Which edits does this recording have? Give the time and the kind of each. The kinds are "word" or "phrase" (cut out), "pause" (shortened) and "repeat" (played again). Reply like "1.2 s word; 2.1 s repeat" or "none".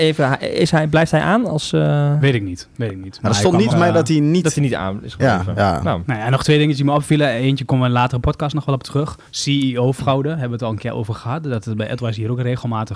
2.7 s pause; 3.7 s phrase; 9.3 s pause